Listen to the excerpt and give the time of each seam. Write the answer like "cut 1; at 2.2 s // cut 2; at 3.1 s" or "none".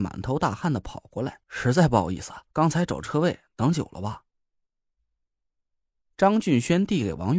cut 1; at 1.4 s // cut 2; at 2.5 s